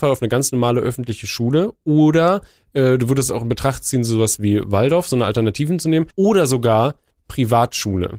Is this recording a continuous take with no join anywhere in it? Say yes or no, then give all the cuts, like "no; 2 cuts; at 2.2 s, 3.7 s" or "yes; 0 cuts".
no; 1 cut; at 6.1 s